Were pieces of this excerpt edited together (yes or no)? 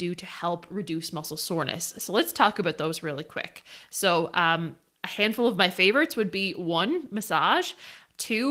no